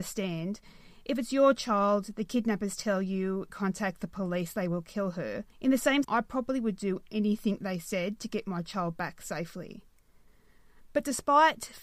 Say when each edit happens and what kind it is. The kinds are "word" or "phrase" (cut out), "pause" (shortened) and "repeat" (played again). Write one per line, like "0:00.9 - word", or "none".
0:03.5 - phrase
0:05.5 - pause
0:06.0 - word